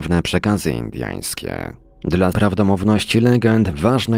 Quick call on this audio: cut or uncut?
cut